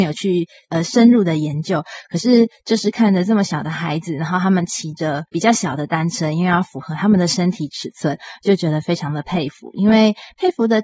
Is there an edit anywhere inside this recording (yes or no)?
yes